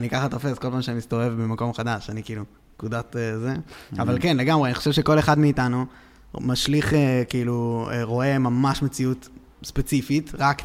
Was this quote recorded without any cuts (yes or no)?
yes